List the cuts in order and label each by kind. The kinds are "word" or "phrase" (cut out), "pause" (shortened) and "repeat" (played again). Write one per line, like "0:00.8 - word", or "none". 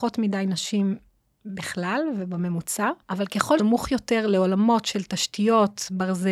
0:03.0 - pause
0:03.6 - word